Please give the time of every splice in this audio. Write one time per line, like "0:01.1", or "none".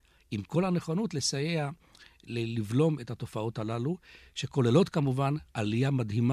none